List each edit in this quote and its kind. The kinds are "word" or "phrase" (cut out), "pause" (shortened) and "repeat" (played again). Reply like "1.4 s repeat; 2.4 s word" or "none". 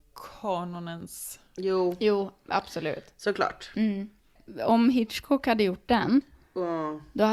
none